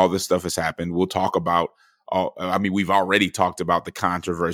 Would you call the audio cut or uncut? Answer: uncut